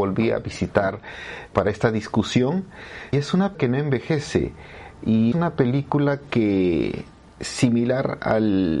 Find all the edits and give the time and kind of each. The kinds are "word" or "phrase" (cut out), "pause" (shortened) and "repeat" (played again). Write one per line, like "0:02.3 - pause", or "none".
0:01.5 - word
0:03.1 - word
0:03.5 - word
0:05.3 - word